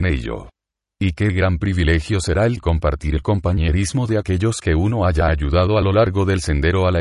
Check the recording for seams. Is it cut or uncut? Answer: uncut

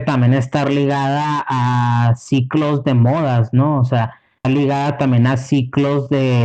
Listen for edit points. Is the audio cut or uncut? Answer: cut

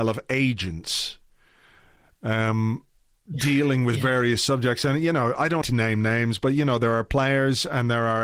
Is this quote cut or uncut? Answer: cut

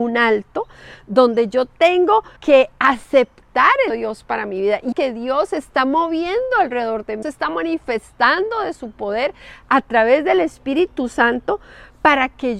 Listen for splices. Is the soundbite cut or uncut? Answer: cut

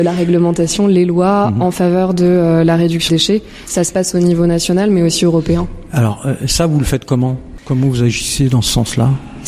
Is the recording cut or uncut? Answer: cut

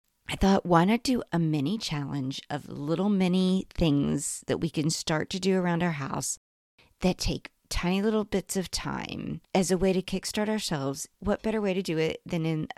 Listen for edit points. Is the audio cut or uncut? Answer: cut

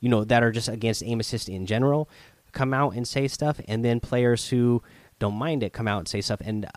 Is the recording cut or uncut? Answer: uncut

